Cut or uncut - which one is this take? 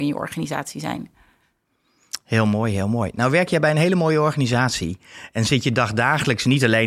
uncut